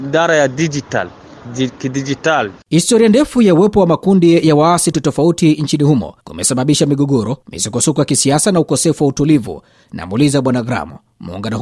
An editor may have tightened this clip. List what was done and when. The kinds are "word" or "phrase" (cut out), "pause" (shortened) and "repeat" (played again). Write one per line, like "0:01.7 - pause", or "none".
0:04.9 - word
0:06.2 - pause
0:07.4 - pause